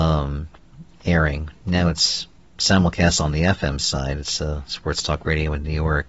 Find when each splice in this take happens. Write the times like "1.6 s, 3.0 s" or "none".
none